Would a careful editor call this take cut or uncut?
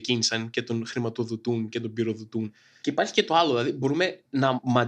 uncut